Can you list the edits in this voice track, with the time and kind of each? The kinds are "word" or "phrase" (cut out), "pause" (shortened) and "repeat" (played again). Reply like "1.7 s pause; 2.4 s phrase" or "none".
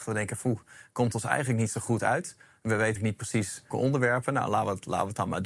3.0 s word; 3.7 s word